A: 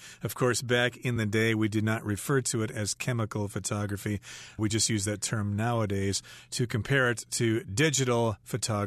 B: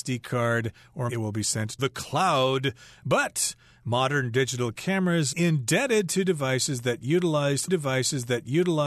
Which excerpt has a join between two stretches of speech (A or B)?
B